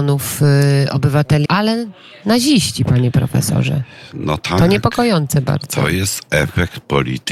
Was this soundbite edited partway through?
yes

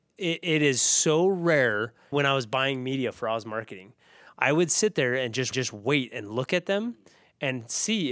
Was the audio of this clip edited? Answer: yes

